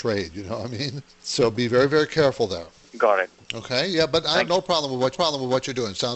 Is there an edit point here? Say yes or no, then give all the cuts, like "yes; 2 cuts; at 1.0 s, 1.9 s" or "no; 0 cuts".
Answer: yes; 1 cut; at 5.1 s